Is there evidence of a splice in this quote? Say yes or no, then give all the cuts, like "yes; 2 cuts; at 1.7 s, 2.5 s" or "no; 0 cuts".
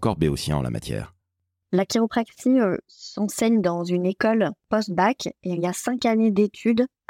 no; 0 cuts